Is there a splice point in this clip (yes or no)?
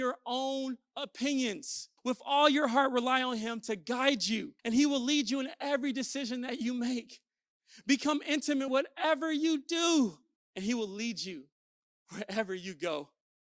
yes